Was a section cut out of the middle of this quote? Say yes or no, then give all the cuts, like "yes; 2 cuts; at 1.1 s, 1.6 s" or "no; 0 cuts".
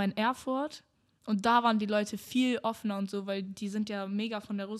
no; 0 cuts